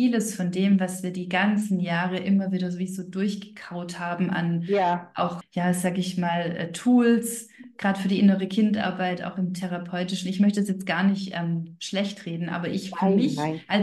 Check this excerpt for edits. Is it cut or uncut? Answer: cut